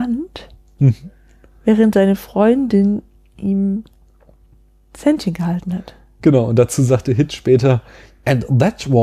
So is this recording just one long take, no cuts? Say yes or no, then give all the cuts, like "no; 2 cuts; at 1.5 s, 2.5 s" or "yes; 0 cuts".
yes; 0 cuts